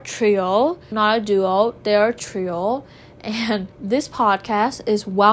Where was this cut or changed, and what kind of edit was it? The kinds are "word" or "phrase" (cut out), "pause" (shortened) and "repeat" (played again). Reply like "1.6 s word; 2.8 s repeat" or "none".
0.9 s word; 3.7 s pause